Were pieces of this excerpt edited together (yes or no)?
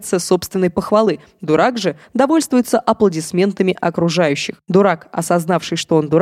no